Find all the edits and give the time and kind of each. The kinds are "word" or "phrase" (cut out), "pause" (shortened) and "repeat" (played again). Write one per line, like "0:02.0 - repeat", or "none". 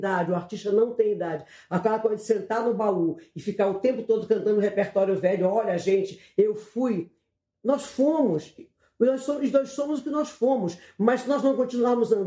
none